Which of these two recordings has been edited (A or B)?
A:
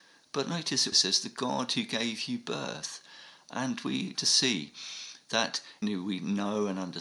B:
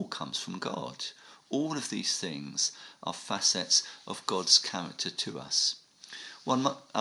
A